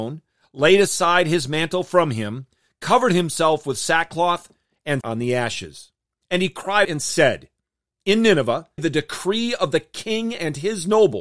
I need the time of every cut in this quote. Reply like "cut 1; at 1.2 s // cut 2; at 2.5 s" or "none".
cut 1; at 5.0 s // cut 2; at 6.8 s // cut 3; at 8.8 s